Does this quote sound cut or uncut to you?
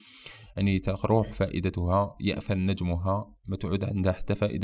uncut